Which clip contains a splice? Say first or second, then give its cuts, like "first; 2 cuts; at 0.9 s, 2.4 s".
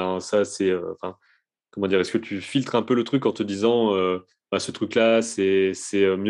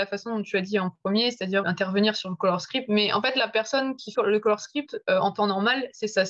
second; 2 cuts; at 1.6 s, 4.1 s